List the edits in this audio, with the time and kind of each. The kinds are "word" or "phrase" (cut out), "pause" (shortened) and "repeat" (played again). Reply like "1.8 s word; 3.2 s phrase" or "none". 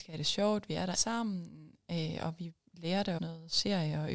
0.9 s word; 3.2 s word